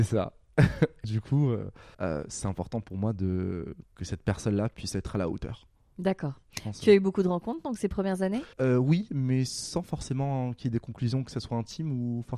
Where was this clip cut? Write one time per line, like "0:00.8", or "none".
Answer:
0:01.0
0:01.9
0:08.5